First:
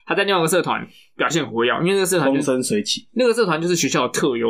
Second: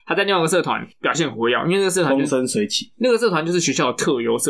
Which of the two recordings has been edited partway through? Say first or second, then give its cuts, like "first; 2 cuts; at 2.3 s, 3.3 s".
second; 1 cut; at 0.9 s